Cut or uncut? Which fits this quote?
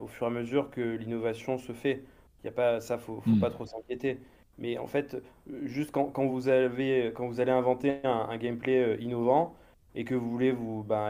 cut